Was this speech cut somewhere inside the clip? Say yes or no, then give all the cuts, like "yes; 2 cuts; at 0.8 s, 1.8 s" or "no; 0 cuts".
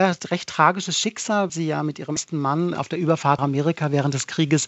yes; 4 cuts; at 1.5 s, 2.2 s, 2.7 s, 3.4 s